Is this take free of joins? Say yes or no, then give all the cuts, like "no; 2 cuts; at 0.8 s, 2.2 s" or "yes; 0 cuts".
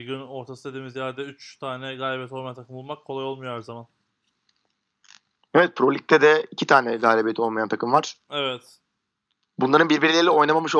yes; 0 cuts